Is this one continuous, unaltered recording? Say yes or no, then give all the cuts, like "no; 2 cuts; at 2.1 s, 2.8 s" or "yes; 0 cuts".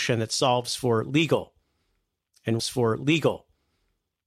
no; 1 cut; at 2.6 s